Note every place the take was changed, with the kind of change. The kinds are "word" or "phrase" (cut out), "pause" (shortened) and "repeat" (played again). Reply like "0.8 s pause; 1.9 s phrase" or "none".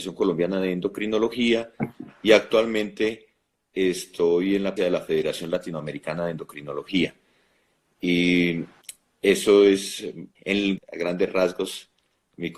4.8 s word; 10.4 s word; 10.8 s word